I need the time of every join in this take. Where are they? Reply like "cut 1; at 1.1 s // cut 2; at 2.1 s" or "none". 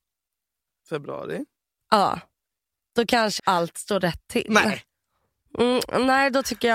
cut 1; at 3.4 s

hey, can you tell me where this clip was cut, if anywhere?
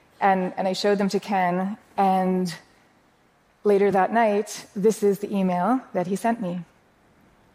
none

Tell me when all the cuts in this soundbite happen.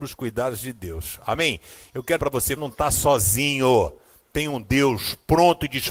cut 1; at 2.2 s // cut 2; at 2.6 s

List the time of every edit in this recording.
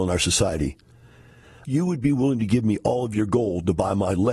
none

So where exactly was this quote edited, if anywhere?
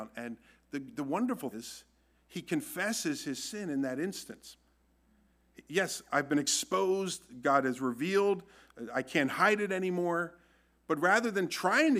cut 1; at 1.5 s

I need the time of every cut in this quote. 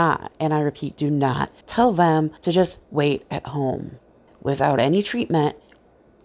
cut 1; at 1.6 s // cut 2; at 2.4 s // cut 3; at 4.3 s

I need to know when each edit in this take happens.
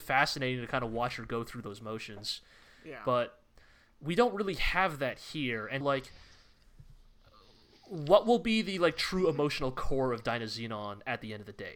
cut 1; at 5.8 s

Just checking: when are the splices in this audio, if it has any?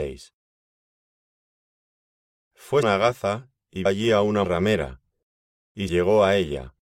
cut 1; at 2.8 s // cut 2; at 3.9 s // cut 3; at 4.4 s // cut 4; at 5.9 s

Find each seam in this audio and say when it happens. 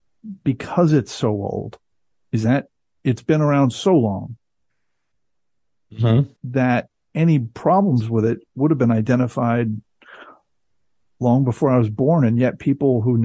cut 1; at 1.9 s // cut 2; at 6.4 s

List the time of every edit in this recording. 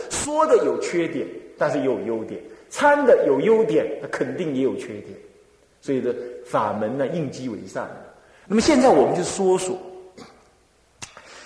none

